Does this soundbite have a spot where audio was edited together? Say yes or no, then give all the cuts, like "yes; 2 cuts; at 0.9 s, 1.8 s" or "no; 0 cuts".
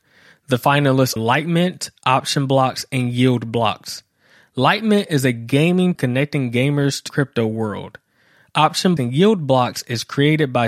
yes; 4 cuts; at 1.2 s, 5.9 s, 7.1 s, 9.0 s